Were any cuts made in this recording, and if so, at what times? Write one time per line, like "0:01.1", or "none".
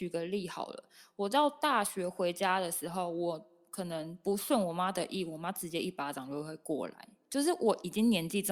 none